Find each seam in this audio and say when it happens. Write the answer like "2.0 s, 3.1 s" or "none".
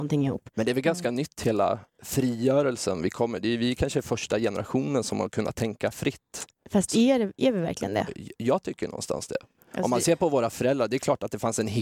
none